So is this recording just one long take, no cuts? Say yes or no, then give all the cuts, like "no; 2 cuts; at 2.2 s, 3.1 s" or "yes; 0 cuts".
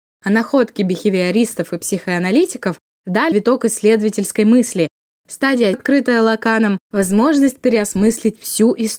no; 2 cuts; at 3.3 s, 5.7 s